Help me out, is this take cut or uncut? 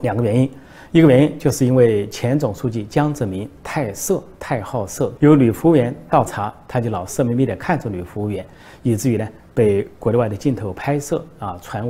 cut